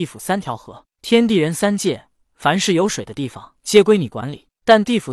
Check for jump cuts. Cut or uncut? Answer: cut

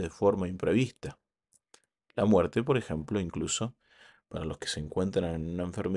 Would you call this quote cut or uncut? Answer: uncut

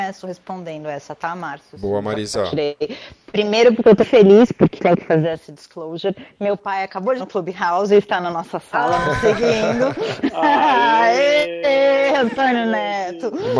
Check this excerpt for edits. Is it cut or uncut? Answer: cut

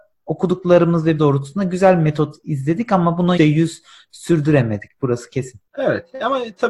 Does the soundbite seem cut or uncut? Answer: cut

